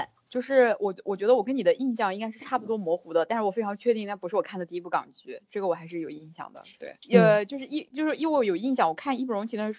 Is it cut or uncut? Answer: cut